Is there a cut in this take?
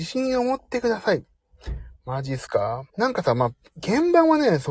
yes; 1 cut; at 2.9 s

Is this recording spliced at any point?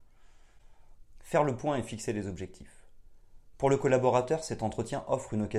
no; 0 cuts

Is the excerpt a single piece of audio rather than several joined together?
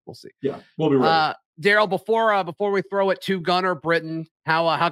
yes; 0 cuts

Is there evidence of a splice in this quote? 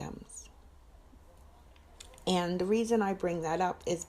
no; 0 cuts

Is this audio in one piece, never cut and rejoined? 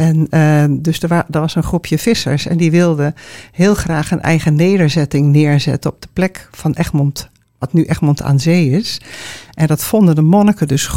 yes; 0 cuts

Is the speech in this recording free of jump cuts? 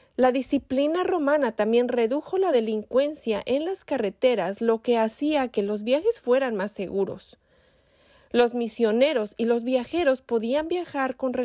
yes; 0 cuts

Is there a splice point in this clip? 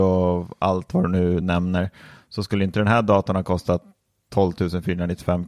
no; 0 cuts

